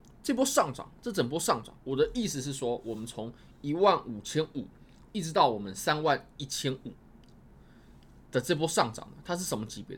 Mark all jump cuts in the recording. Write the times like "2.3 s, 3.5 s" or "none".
1.8 s